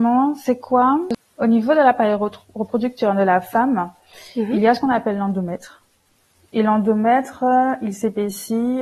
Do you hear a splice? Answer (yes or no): no